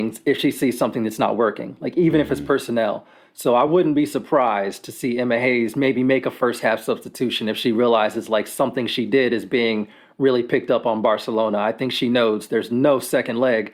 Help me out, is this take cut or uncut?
uncut